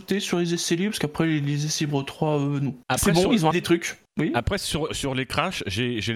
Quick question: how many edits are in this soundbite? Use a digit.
4